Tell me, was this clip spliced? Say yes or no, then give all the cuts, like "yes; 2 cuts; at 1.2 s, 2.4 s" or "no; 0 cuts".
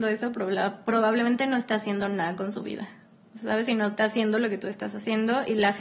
no; 0 cuts